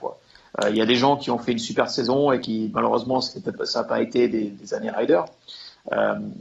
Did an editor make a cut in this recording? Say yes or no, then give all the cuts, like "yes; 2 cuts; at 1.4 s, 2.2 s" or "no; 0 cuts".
no; 0 cuts